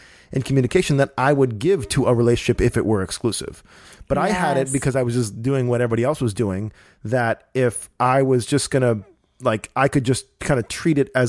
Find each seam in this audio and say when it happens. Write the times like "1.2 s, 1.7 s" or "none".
none

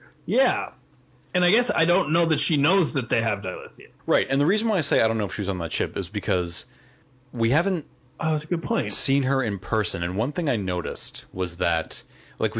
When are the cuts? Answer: 4.0 s, 7.0 s, 8.1 s

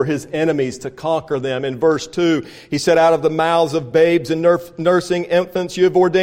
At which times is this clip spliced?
none

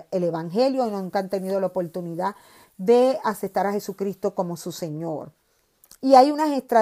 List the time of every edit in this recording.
none

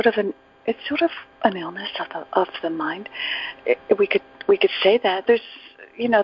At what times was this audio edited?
5.3 s

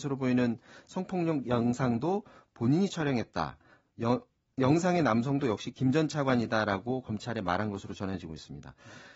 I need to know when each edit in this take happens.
none

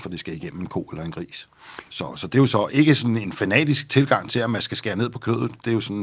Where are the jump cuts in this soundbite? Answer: 1.9 s, 2.7 s

